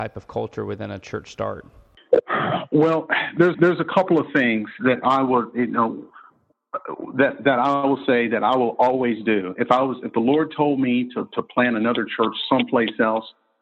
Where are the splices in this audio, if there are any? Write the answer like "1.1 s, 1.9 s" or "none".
3.5 s

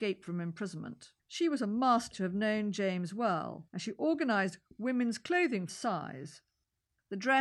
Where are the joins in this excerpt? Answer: 1.2 s, 2.1 s, 3.7 s, 5.7 s

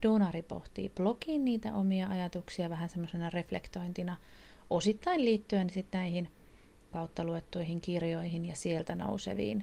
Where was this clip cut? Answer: 6.9 s

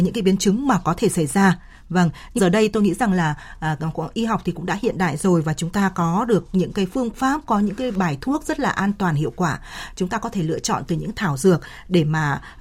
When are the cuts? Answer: 2.4 s

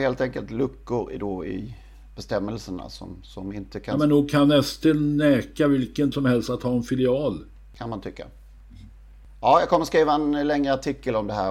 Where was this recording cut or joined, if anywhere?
6.1 s

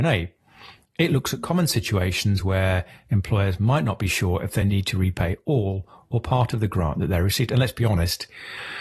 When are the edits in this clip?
none

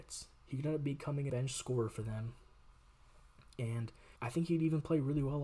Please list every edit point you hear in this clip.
1.3 s, 4.2 s

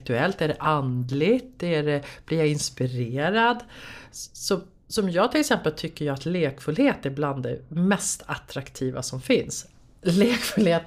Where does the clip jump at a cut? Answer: none

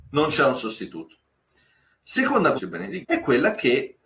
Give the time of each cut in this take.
2.6 s, 3.0 s

